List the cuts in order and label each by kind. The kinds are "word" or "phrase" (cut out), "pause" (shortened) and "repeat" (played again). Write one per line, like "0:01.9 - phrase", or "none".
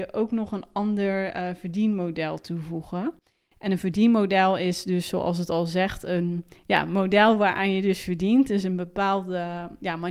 none